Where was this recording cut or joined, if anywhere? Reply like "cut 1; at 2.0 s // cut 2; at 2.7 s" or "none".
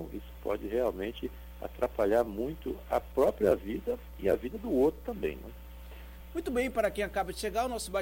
none